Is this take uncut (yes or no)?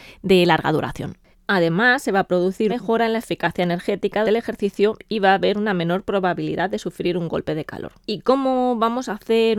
no